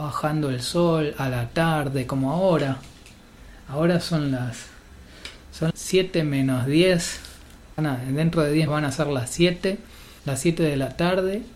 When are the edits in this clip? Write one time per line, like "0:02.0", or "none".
0:05.7
0:07.8
0:08.7
0:10.2